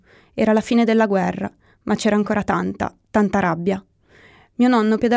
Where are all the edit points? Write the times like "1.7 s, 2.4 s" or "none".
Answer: none